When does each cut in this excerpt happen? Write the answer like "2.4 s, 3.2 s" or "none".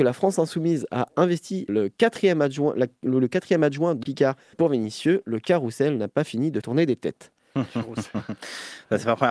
1.7 s, 4.0 s, 4.5 s, 6.6 s